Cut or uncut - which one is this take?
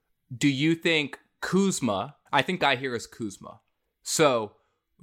cut